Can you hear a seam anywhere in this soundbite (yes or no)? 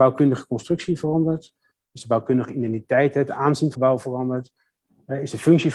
yes